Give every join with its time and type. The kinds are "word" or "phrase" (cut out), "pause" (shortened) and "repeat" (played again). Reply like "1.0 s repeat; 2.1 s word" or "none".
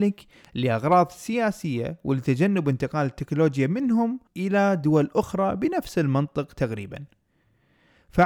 4.3 s word